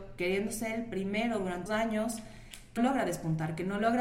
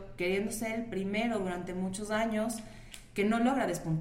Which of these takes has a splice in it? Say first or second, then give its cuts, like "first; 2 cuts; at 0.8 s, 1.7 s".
first; 2 cuts; at 1.7 s, 2.8 s